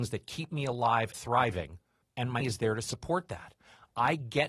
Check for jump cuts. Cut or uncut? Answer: cut